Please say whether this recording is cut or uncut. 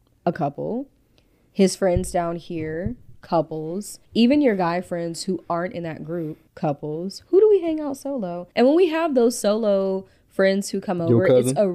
cut